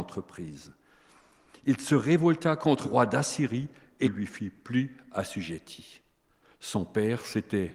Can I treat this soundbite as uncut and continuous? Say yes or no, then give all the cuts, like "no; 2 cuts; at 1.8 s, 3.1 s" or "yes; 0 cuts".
no; 2 cuts; at 2.8 s, 4.0 s